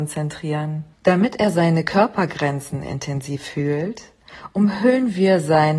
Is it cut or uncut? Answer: cut